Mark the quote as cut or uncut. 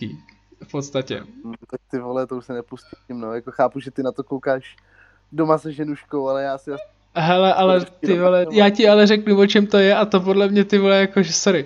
cut